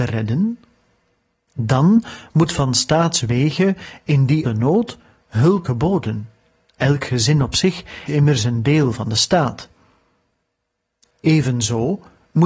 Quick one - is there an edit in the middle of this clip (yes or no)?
yes